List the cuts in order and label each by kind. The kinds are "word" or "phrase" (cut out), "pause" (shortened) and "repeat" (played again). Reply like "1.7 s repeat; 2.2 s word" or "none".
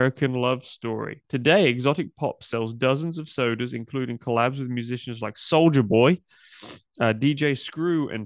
1.2 s pause